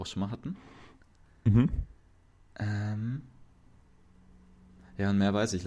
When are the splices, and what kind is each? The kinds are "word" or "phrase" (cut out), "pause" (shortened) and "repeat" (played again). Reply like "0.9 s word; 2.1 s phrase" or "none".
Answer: none